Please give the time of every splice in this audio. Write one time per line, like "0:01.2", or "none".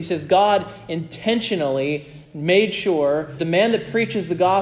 0:03.4